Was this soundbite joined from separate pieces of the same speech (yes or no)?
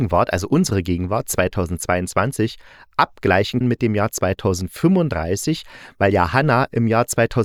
yes